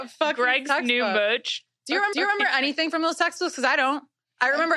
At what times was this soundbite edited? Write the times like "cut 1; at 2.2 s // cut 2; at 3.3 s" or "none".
cut 1; at 2.1 s